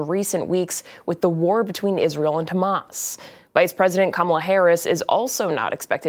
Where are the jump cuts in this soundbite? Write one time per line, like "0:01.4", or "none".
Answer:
none